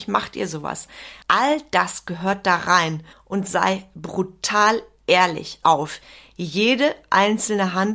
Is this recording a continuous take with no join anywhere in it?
no; 3 cuts; at 1.2 s, 3.1 s, 5.6 s

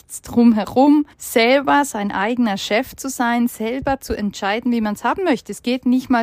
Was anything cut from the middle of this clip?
yes; 1 cut; at 1.1 s

